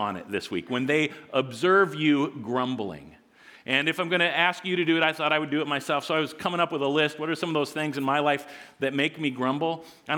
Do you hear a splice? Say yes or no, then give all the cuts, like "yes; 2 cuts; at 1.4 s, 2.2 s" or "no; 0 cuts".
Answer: no; 0 cuts